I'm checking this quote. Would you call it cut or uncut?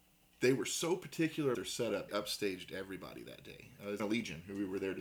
cut